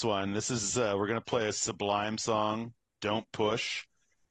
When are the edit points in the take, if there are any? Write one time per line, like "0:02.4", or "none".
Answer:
0:02.9